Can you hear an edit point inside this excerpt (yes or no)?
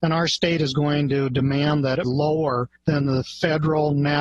yes